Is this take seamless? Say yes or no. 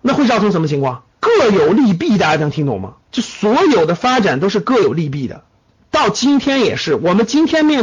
no